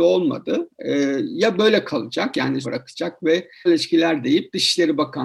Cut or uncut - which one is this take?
cut